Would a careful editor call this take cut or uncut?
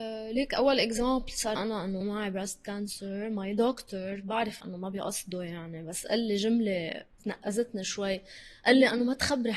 cut